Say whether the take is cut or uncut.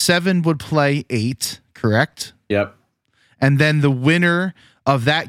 uncut